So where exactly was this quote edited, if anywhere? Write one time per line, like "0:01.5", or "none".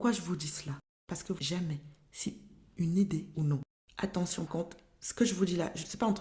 0:01.4
0:03.3
0:04.5

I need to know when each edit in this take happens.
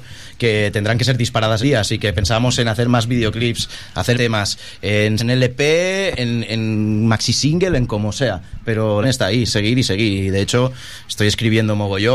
0:01.6
0:04.1
0:05.2
0:06.1
0:09.0
0:09.5

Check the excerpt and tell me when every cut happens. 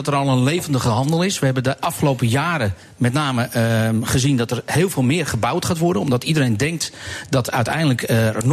none

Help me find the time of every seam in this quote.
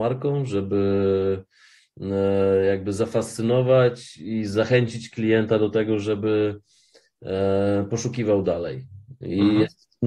none

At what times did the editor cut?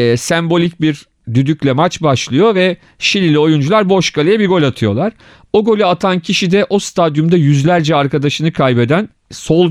none

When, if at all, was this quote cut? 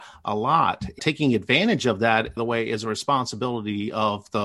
0:01.0
0:02.4

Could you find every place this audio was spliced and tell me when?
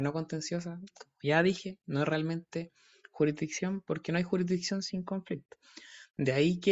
none

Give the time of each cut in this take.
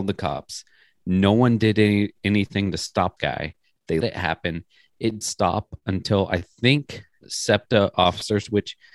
0:03.2
0:04.0
0:05.2
0:07.2

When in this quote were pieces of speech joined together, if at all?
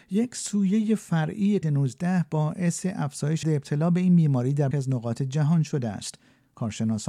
0:01.6
0:03.4
0:04.7

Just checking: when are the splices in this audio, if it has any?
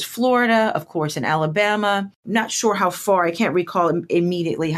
none

